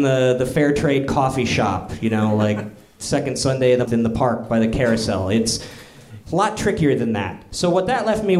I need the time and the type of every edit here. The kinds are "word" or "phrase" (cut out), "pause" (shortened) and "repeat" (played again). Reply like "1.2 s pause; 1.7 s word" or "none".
3.8 s word; 6.2 s pause